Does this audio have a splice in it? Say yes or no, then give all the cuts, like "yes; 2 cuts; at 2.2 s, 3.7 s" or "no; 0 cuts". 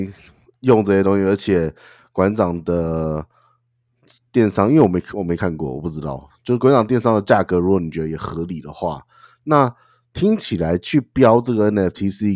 no; 0 cuts